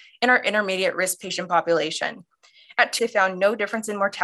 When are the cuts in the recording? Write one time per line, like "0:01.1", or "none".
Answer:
0:03.0